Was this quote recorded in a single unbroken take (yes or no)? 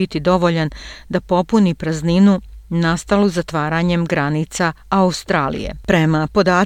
yes